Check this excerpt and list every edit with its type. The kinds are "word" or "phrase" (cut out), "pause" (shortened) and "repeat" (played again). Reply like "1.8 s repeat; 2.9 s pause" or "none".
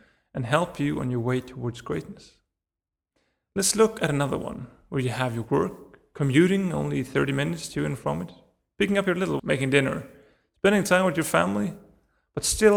9.4 s word